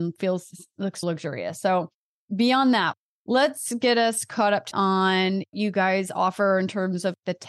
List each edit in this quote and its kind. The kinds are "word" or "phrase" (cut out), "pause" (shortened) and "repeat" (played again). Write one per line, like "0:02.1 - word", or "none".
0:01.0 - word
0:04.7 - word
0:05.5 - word